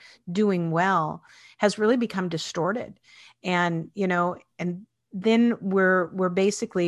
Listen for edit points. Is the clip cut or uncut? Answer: uncut